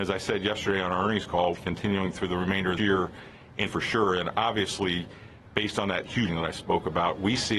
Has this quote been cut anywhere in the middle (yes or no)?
yes